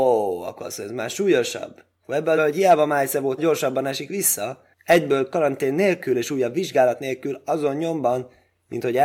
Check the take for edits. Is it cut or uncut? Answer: cut